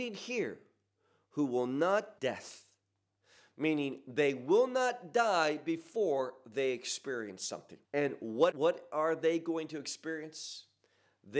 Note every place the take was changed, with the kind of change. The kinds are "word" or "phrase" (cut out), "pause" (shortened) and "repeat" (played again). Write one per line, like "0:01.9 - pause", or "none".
0:02.2 - word
0:07.8 - pause
0:08.5 - word